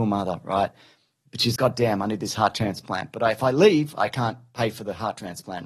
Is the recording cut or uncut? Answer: cut